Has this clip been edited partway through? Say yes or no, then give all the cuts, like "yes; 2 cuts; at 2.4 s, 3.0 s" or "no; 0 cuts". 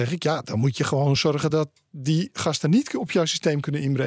no; 0 cuts